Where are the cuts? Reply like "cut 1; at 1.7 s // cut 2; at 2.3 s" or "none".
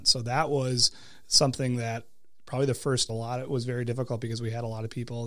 cut 1; at 3.1 s